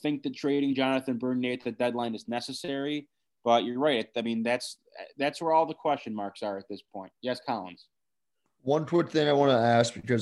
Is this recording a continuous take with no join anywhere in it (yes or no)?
yes